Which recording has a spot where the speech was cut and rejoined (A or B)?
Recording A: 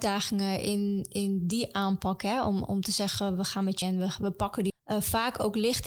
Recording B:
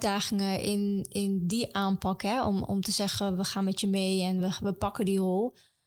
A